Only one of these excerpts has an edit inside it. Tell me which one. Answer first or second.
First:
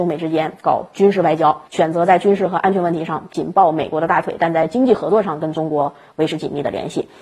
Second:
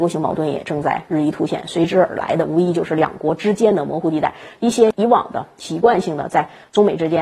first